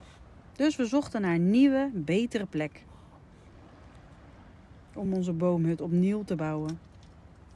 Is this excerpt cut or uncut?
uncut